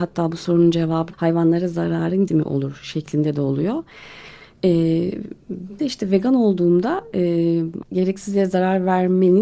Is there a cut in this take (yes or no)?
yes